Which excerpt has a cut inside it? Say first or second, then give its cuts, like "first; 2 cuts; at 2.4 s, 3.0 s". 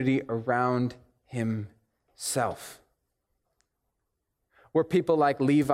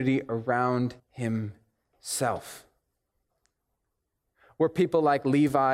second; 1 cut; at 1.0 s